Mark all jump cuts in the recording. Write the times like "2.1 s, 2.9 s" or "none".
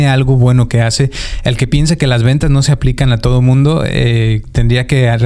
none